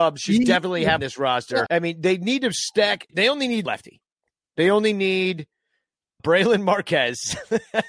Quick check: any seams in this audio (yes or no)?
yes